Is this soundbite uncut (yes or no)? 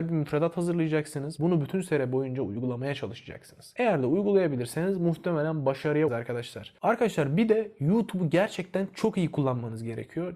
no